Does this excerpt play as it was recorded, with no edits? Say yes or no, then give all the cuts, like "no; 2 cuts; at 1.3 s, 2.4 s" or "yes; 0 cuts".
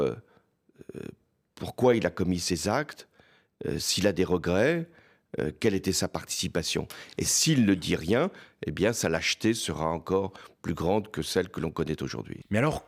yes; 0 cuts